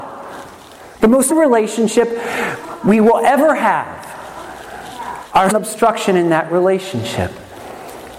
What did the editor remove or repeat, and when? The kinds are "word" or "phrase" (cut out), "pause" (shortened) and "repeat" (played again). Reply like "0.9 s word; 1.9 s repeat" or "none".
1.3 s word; 5.5 s phrase